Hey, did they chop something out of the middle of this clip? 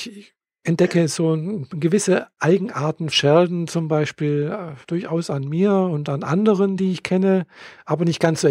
yes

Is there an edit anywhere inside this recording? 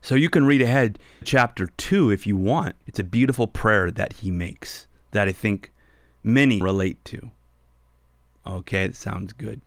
yes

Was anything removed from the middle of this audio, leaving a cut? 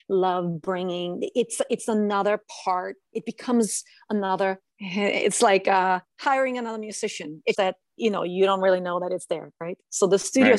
yes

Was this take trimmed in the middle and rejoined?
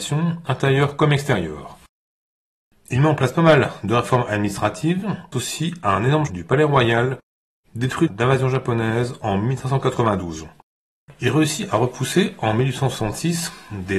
yes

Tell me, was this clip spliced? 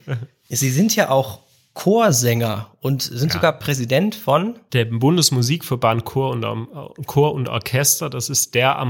no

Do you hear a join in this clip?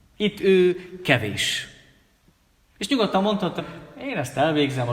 yes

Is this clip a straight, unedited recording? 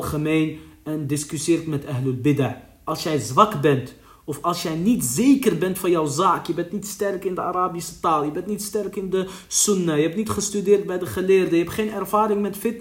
yes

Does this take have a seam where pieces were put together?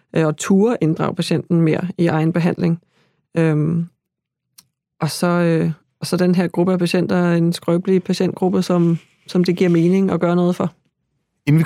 no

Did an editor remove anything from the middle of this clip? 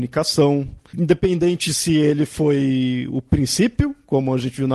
no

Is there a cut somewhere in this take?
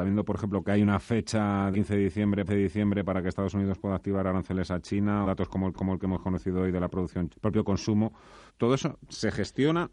yes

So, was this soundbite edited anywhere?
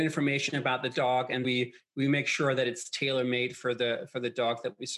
yes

